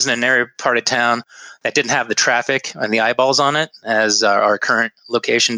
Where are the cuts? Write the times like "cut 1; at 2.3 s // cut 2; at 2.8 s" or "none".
none